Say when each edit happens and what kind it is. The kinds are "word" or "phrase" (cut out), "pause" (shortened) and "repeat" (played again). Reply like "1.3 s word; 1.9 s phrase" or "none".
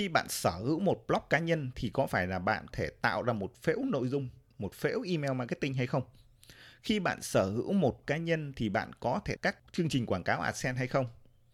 2.7 s word; 8.0 s word; 9.4 s word

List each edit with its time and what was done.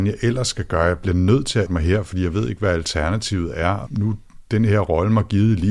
1.7 s word; 3.9 s word

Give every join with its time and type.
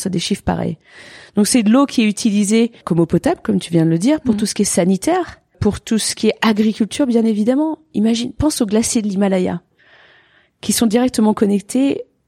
2.8 s pause

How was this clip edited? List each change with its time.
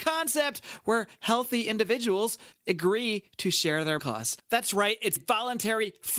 2.5 s pause; 4.0 s word; 5.2 s word

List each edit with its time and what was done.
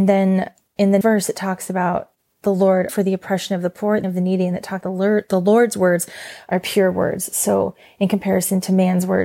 1.0 s word; 2.9 s word; 4.0 s word; 4.8 s word

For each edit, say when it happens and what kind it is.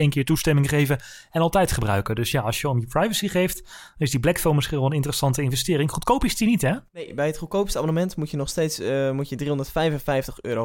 6.9 s pause

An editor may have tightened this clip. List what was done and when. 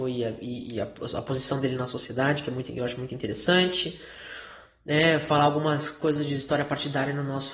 none

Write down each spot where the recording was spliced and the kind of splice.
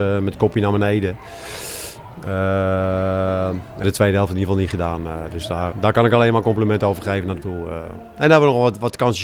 3.8 s phrase; 5.7 s word; 7.4 s word

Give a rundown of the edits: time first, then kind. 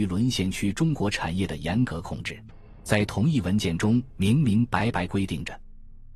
2.8 s pause

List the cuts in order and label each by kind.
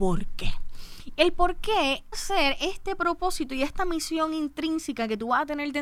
2.1 s word

